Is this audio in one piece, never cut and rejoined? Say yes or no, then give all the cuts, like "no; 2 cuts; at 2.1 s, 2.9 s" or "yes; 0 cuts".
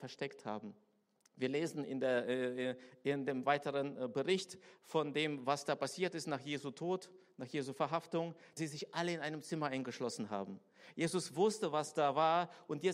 no; 1 cut; at 8.6 s